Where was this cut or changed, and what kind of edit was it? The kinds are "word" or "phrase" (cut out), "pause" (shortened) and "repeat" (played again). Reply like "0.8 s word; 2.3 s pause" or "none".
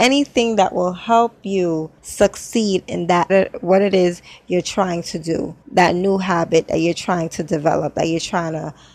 2.0 s pause; 3.3 s phrase; 5.6 s pause